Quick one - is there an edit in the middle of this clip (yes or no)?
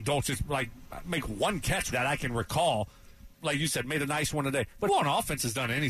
yes